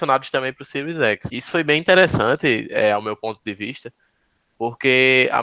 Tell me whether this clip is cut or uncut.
uncut